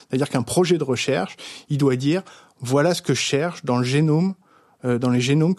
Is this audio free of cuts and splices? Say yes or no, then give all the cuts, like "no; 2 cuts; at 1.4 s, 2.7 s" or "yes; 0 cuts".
yes; 0 cuts